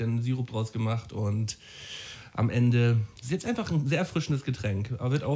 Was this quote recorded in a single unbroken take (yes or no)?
no